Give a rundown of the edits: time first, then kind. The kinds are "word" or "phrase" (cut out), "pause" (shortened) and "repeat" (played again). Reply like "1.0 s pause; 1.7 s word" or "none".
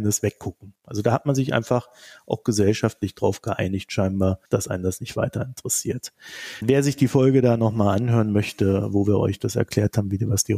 4.5 s pause